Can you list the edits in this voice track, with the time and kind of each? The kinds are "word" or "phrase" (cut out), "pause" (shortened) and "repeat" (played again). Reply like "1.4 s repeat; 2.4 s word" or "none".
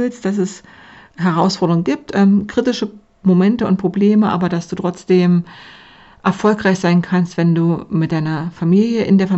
none